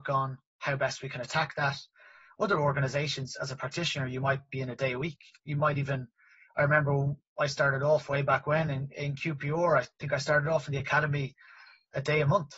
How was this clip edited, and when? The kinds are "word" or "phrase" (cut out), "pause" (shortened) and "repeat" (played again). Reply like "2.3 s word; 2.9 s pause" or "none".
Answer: none